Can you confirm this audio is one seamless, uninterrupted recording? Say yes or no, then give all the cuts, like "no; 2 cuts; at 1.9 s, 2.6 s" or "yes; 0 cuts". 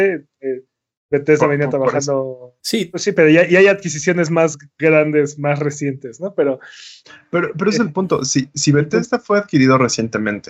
no; 1 cut; at 2.6 s